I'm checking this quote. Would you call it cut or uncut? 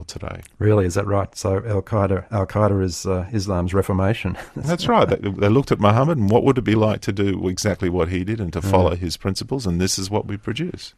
uncut